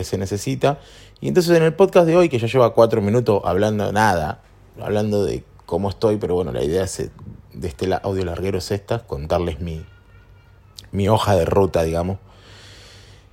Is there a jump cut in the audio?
no; 0 cuts

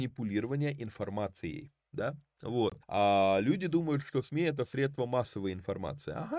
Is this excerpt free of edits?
no; 1 cut; at 2.8 s

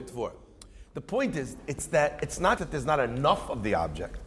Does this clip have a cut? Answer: yes; 1 cut; at 2.6 s

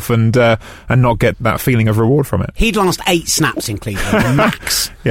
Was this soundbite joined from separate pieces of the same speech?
yes; 1 cut; at 1.3 s

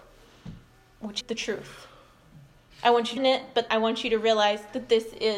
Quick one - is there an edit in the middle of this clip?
yes; 3 cuts; at 1.2 s, 3.2 s, 3.7 s

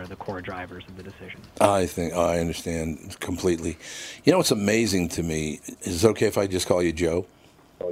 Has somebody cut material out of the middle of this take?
no; 0 cuts

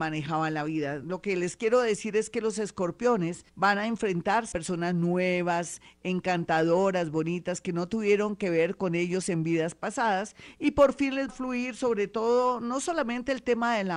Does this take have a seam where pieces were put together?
yes; 3 cuts; at 3.5 s, 4.5 s, 11.3 s

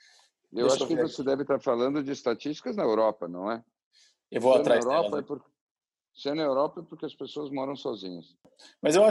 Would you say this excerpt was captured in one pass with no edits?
yes; 0 cuts

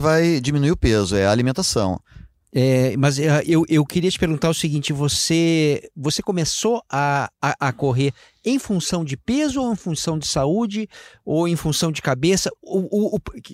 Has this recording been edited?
no; 0 cuts

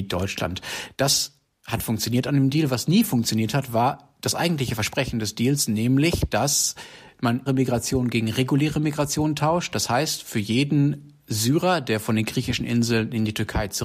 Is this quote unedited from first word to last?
no; 1 cut; at 7.5 s

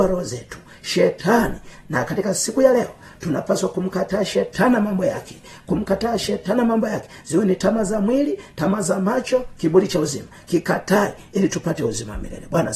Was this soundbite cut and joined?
no; 0 cuts

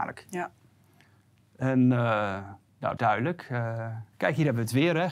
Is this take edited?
yes; 2 cuts; at 3.0 s, 4.1 s

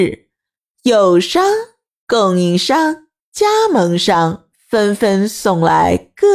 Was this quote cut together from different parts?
no; 0 cuts

